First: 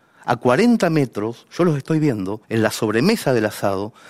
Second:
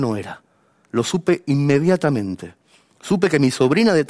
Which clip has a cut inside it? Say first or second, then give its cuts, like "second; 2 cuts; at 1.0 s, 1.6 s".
first; 1 cut; at 2.4 s